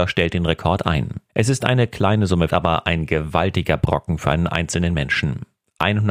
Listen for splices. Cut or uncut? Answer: cut